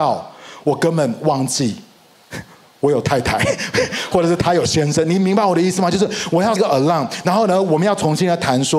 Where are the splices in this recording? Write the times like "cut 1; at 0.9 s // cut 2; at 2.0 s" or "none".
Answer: cut 1; at 6.6 s

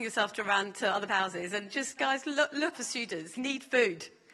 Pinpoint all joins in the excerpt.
cut 1; at 1.1 s // cut 2; at 2.0 s // cut 3; at 2.7 s // cut 4; at 3.4 s

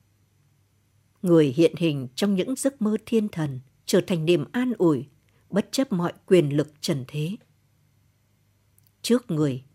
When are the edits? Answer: cut 1; at 3.7 s

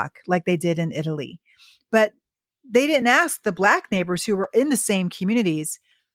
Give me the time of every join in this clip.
none

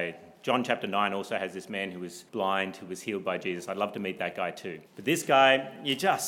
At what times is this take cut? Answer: cut 1; at 2.3 s // cut 2; at 4.9 s

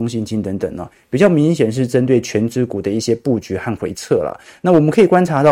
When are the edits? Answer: none

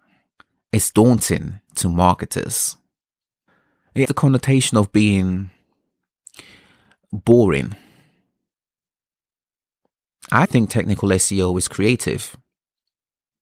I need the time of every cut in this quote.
cut 1; at 0.9 s // cut 2; at 4.0 s // cut 3; at 10.4 s // cut 4; at 11.7 s

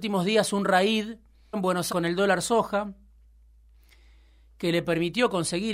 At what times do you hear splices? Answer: cut 1; at 1.5 s // cut 2; at 1.9 s

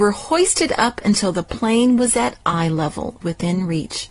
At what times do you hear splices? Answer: cut 1; at 3.2 s

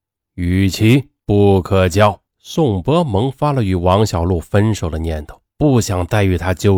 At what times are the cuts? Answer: cut 1; at 1.2 s // cut 2; at 2.3 s // cut 3; at 5.5 s

